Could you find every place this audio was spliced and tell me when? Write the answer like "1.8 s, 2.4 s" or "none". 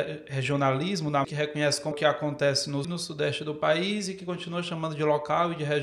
1.2 s, 1.9 s, 2.8 s